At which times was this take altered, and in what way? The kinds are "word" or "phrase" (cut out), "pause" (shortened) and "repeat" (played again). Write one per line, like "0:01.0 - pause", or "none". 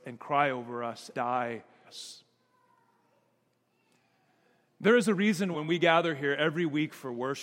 0:01.1 - word
0:01.8 - word
0:05.5 - word